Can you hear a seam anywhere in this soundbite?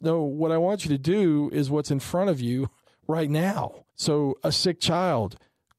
yes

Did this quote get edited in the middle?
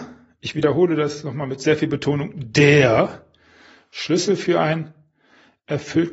no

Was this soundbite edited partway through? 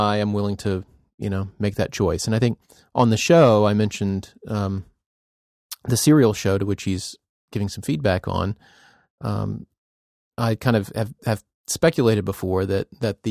no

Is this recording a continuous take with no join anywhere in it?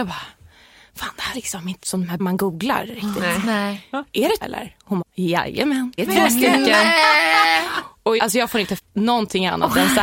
no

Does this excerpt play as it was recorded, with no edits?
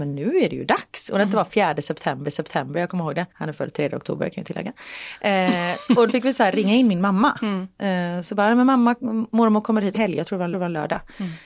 no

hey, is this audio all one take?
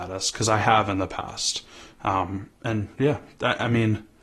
no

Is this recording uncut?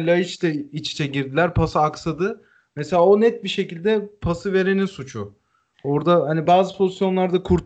yes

